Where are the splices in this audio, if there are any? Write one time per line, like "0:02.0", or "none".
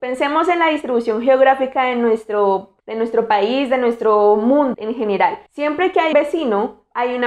0:02.8
0:04.7
0:05.5
0:06.1